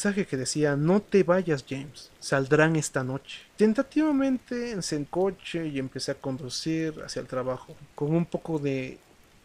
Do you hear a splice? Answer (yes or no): yes